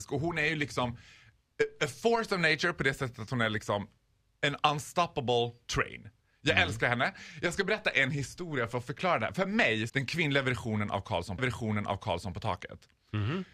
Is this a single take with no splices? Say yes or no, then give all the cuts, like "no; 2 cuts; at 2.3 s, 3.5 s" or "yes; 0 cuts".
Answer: no; 3 cuts; at 9.3 s, 9.9 s, 11.4 s